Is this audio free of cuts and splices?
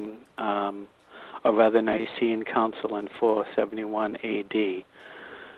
yes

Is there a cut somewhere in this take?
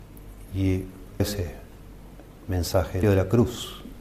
yes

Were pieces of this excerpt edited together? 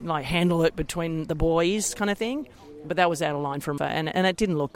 yes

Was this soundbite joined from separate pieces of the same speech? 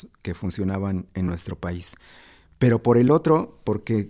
no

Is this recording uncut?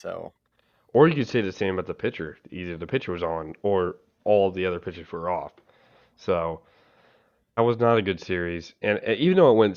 no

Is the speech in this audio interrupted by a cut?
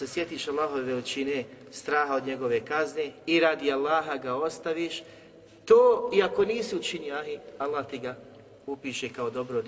no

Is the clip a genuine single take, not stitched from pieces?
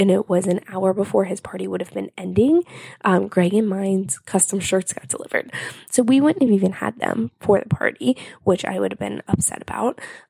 yes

